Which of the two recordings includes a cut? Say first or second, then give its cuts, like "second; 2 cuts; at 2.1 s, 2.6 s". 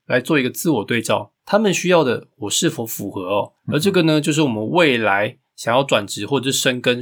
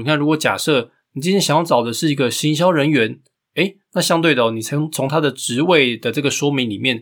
first; 2 cuts; at 1.4 s, 3.6 s